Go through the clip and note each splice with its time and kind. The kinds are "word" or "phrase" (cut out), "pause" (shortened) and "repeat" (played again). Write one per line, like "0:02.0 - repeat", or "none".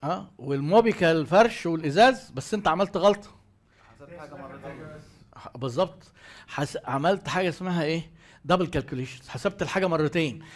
none